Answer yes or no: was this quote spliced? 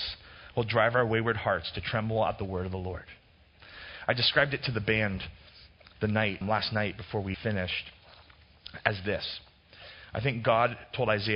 yes